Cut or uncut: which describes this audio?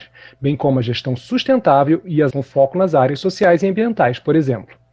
cut